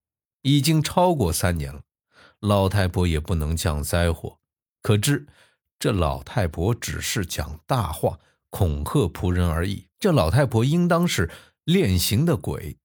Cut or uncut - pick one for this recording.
cut